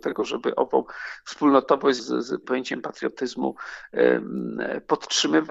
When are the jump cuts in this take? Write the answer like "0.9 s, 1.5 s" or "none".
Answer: 2.0 s, 2.4 s